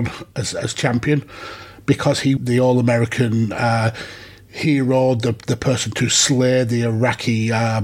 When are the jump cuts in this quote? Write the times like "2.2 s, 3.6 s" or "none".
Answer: 2.4 s